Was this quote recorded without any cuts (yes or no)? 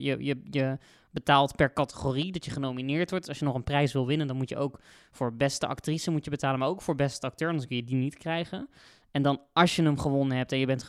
yes